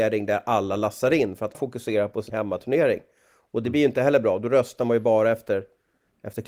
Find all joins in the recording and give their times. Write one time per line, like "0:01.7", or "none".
0:01.5
0:02.3